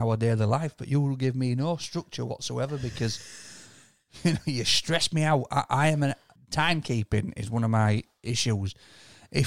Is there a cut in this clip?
yes; 1 cut; at 6.4 s

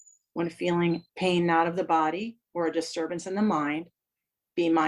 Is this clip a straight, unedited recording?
no; 1 cut; at 1.1 s

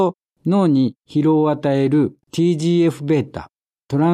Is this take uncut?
no; 1 cut; at 2.2 s

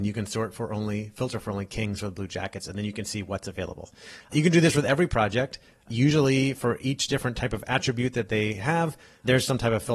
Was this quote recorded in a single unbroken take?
yes; 0 cuts

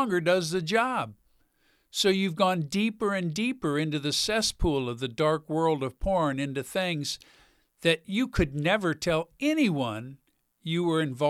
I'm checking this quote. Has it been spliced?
no; 0 cuts

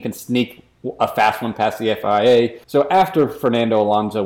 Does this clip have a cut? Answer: yes; 1 cut; at 2.6 s

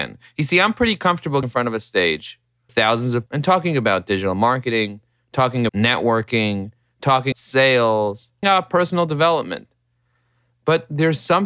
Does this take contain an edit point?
yes; 6 cuts; at 1.4 s, 2.7 s, 3.3 s, 5.7 s, 7.3 s, 8.4 s

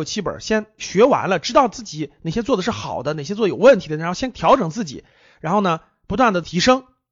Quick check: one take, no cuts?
yes; 0 cuts

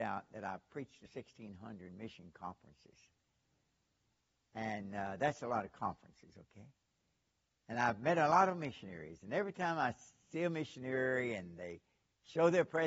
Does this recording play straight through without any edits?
no; 1 cut; at 1.1 s

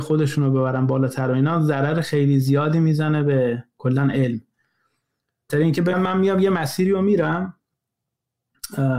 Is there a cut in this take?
yes; 2 cuts; at 5.5 s, 5.9 s

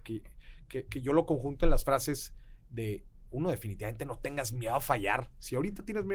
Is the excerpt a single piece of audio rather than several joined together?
yes; 0 cuts

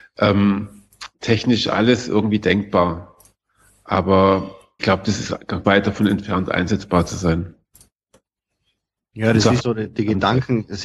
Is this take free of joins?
no; 3 cuts; at 4.8 s, 5.6 s, 9.6 s

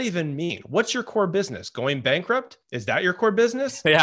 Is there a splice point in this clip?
yes; 1 cut; at 2.6 s

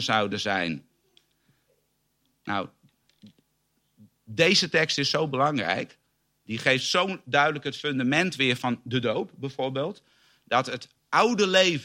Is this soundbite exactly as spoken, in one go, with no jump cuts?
yes; 0 cuts

